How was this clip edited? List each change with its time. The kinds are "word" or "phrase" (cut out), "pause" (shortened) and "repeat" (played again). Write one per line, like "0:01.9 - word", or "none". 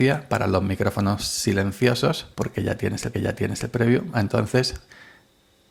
0:02.3 - pause
0:03.1 - repeat